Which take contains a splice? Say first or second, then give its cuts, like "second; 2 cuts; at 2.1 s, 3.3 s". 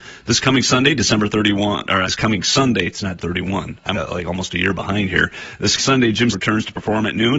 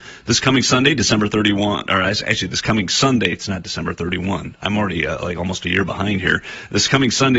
first; 5 cuts; at 2.0 s, 3.2 s, 3.9 s, 5.8 s, 6.3 s